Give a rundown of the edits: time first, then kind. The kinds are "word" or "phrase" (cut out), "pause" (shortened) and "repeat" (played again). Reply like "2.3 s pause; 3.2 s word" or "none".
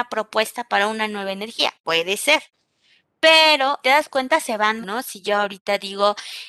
3.8 s phrase; 4.8 s word